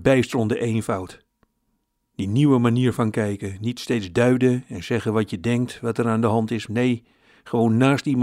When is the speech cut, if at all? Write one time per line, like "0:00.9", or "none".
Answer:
none

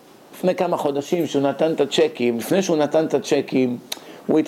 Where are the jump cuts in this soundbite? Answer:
none

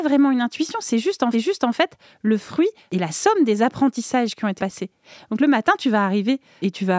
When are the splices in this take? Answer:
0:01.3
0:04.6

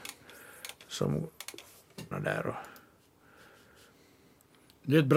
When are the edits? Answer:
0:02.1

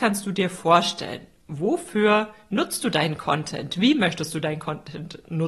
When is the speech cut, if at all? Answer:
none

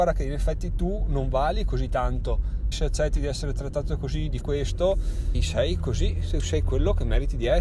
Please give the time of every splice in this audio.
0:02.7
0:04.4
0:05.3

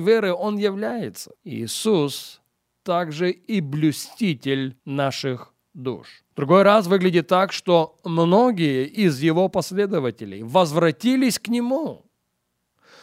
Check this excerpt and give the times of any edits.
0:01.4
0:04.8
0:06.3

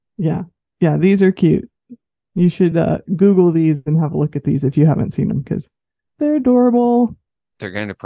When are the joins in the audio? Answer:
none

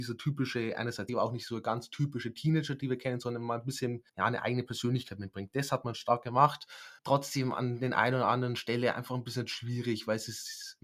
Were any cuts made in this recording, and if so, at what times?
0:01.1
0:04.1
0:07.0

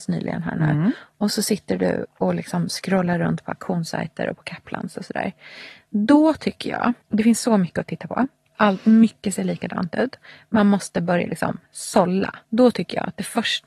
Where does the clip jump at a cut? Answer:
0:07.0
0:12.4

